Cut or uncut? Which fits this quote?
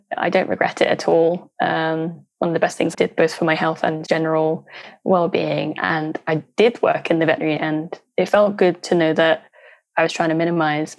cut